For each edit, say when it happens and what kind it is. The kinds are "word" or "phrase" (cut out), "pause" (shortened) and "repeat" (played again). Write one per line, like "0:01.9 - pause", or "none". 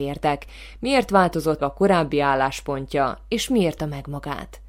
0:01.6 - word
0:03.8 - word